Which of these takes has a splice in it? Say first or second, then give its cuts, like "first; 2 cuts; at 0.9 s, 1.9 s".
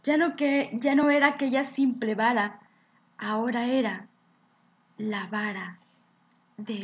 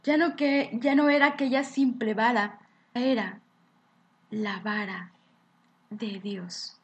second; 1 cut; at 3.0 s